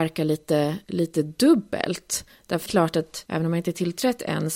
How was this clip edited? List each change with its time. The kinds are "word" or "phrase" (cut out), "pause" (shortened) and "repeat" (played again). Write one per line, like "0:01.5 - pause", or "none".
0:02.7 - phrase
0:03.3 - word